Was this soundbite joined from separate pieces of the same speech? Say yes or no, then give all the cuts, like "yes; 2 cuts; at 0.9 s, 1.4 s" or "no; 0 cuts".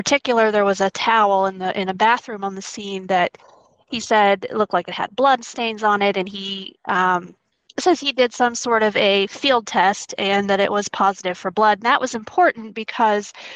no; 0 cuts